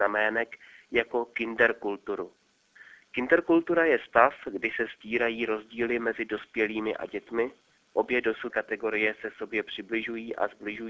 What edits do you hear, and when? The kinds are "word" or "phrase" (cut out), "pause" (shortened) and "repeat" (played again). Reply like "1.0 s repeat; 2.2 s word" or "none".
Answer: 8.5 s word